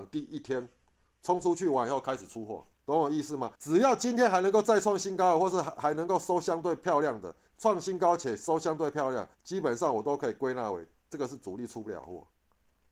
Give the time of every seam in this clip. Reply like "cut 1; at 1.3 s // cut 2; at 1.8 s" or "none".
cut 1; at 2.7 s // cut 2; at 3.5 s // cut 3; at 9.3 s